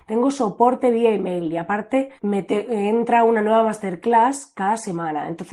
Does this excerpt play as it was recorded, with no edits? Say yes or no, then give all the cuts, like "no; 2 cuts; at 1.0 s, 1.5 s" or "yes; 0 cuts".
no; 1 cut; at 2.2 s